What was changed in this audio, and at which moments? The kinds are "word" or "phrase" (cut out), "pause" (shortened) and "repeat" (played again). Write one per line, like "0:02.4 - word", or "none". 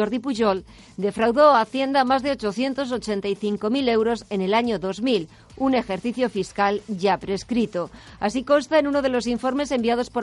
none